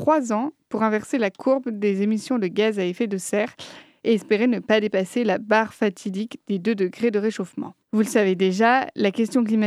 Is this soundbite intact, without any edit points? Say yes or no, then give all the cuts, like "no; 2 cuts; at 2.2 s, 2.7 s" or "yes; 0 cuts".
no; 1 cut; at 7.8 s